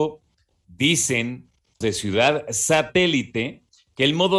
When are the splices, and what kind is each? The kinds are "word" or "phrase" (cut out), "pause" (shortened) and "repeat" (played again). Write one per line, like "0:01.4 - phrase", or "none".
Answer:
0:01.8 - word